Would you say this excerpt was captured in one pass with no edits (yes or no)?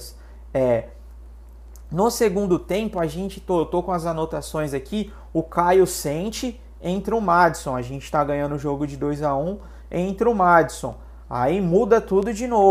yes